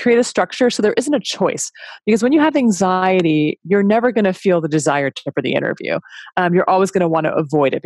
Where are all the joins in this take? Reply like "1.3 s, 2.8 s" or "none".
5.3 s